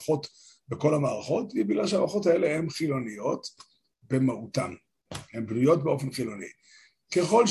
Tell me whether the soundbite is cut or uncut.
uncut